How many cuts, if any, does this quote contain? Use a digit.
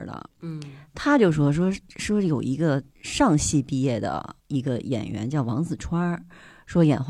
2